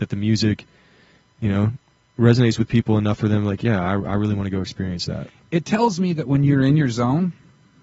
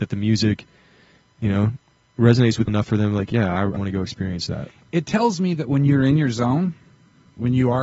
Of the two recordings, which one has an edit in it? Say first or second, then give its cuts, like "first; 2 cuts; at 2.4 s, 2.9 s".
second; 2 cuts; at 2.7 s, 3.8 s